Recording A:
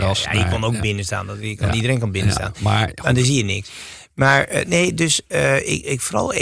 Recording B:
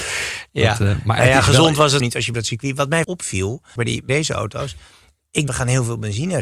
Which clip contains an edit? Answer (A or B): B